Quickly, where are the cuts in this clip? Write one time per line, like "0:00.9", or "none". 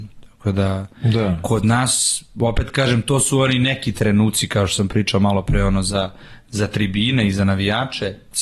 none